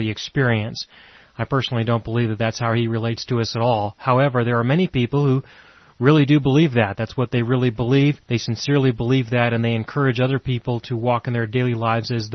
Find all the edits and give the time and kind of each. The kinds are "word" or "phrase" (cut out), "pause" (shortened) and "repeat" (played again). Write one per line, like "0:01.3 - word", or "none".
0:08.2 - pause

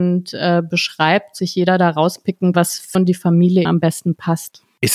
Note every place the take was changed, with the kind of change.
0:01.4 - word
0:02.5 - word
0:02.9 - word
0:03.6 - word

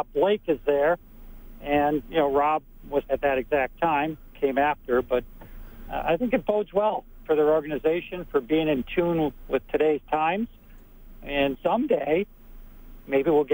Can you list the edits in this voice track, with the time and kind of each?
0:02.0 - word
0:03.0 - phrase
0:11.5 - word

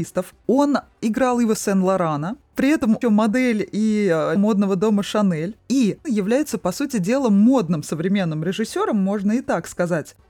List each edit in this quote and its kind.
0:03.0 - phrase
0:04.4 - word
0:06.0 - phrase

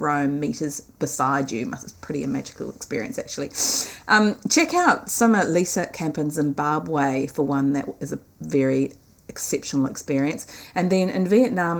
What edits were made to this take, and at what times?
0:00.9 - pause

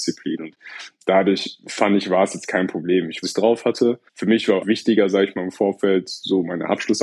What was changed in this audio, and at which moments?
0:03.2 - phrase
0:04.1 - pause
0:04.6 - word

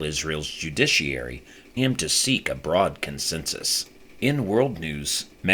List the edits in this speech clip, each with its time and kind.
0:01.8 - word

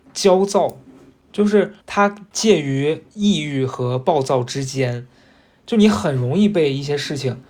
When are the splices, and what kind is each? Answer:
0:01.8 - pause

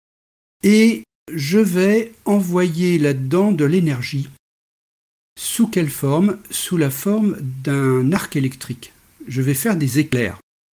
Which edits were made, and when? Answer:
0:01.1 - pause

